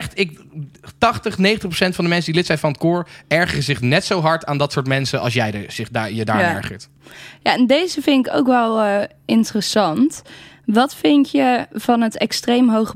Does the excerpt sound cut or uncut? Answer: uncut